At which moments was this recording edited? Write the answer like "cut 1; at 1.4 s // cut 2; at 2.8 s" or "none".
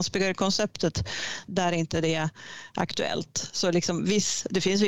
cut 1; at 1.5 s